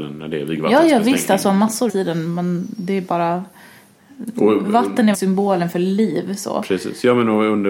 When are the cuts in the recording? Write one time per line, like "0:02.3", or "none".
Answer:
0:01.9
0:05.1

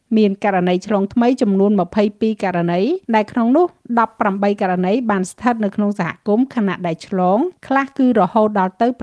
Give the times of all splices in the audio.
0:03.0
0:07.6

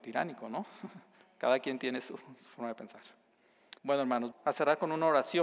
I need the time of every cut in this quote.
0:03.8
0:04.3

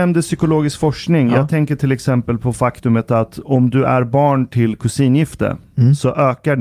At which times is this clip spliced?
none

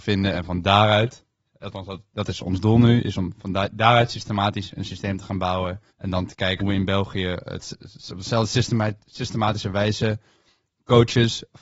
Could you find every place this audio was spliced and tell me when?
0:05.9
0:06.6

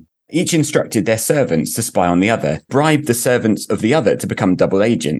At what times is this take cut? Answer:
0:02.7

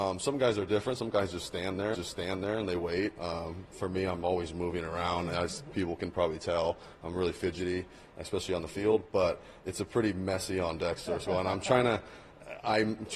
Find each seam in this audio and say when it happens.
0:01.9

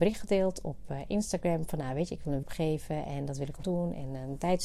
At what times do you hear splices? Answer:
0:02.4
0:03.6

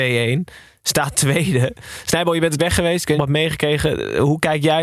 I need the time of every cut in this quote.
0:02.6
0:03.1

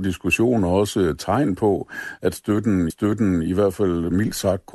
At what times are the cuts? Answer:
0:02.9

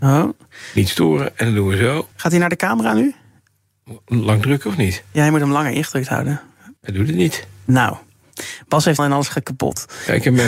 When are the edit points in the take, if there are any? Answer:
0:02.1
0:06.8
0:09.0

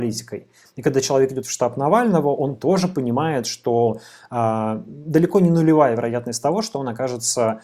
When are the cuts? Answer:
0:01.4

